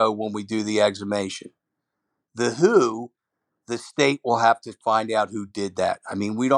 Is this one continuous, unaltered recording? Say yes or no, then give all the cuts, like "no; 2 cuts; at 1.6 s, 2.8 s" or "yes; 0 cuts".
yes; 0 cuts